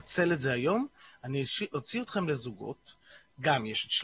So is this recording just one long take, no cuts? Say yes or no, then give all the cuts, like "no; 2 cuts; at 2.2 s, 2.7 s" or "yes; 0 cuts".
yes; 0 cuts